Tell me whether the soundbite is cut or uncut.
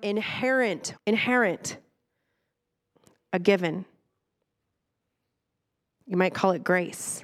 cut